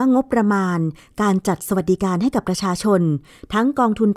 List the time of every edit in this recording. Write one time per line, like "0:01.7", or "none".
none